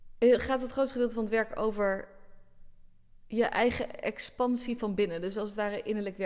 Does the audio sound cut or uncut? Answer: uncut